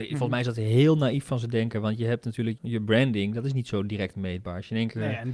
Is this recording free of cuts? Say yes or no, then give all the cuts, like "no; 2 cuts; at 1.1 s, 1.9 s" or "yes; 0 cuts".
no; 1 cut; at 2.6 s